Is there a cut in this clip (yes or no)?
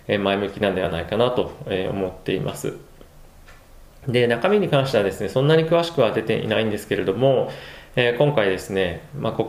no